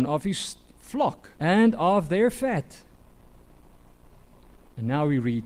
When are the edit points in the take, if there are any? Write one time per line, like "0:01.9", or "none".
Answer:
0:01.4